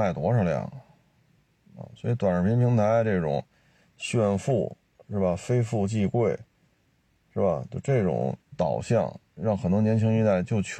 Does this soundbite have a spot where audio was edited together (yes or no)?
yes